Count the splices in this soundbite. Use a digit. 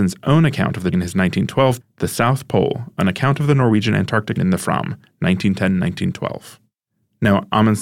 3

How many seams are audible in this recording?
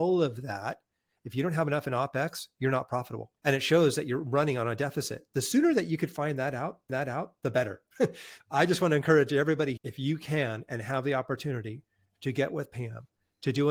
4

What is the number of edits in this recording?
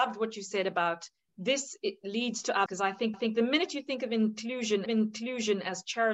4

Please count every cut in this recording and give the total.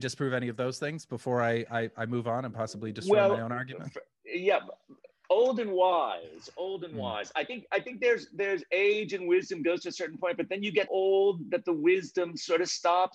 1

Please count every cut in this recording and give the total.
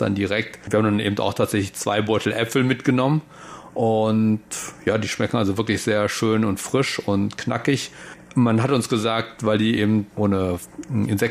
0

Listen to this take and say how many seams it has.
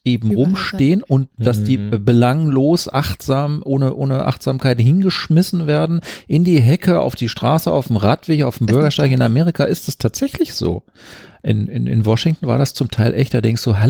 0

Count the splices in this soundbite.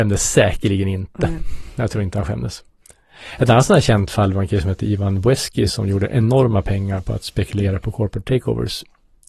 0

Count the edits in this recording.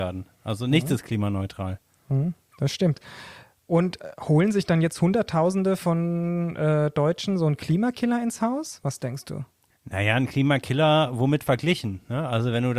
1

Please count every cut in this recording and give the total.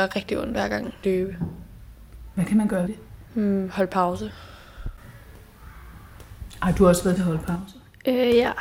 4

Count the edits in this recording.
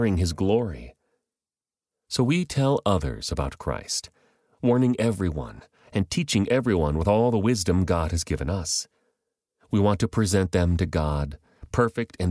0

